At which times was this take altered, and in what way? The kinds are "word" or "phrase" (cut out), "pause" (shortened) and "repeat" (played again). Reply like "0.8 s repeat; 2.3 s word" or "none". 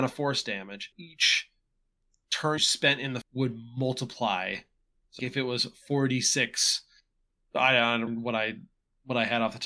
0.9 s word; 2.6 s word; 3.2 s word; 5.2 s word; 8.1 s word